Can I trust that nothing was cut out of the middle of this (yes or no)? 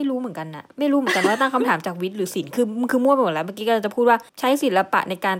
no